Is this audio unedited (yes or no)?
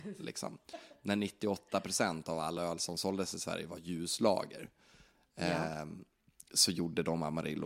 yes